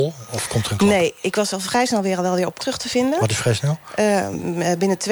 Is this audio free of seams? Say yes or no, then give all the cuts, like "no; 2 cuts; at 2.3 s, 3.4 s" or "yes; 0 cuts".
no; 2 cuts; at 1.2 s, 2.6 s